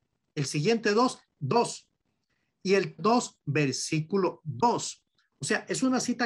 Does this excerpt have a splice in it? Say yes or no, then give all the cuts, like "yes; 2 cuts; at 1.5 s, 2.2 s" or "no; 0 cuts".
yes; 2 cuts; at 1.4 s, 3.0 s